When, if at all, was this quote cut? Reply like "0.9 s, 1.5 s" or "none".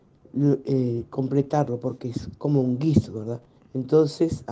3.6 s